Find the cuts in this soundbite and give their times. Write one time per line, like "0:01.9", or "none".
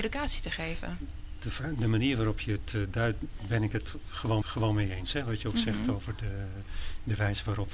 0:04.4